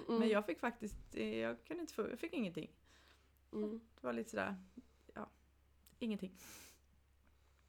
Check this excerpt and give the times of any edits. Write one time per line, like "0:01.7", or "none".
none

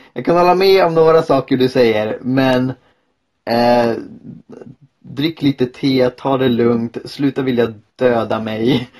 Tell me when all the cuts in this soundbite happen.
none

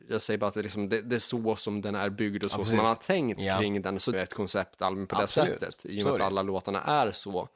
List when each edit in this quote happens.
0:04.1

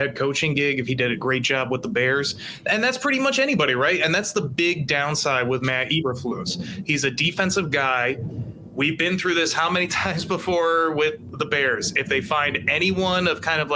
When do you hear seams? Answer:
none

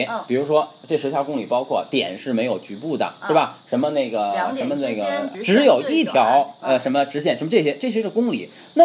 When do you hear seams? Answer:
0:05.3

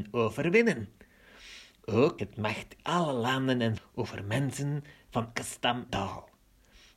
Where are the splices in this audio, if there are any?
0:02.2
0:02.8
0:03.8
0:05.4
0:05.9

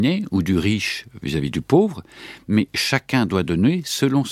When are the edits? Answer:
none

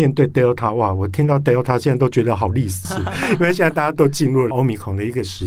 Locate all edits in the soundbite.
none

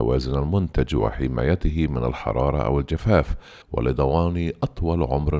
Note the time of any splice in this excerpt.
0:03.6

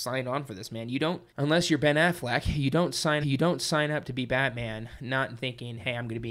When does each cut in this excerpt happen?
0:01.3
0:03.2

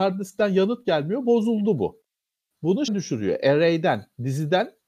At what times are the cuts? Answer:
0:02.9

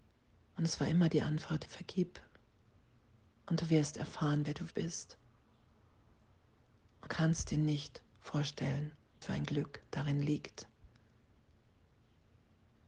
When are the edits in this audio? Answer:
0:01.7
0:04.7
0:07.1
0:09.2

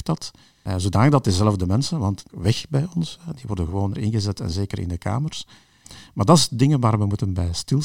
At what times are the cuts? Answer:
0:02.3
0:03.9

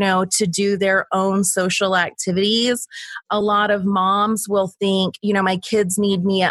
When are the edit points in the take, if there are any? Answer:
none

